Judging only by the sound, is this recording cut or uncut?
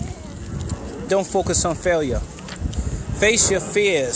cut